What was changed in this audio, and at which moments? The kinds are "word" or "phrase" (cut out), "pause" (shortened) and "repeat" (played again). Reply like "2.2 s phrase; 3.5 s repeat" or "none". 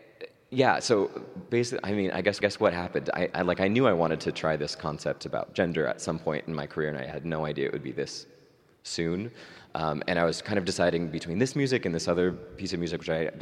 2.4 s repeat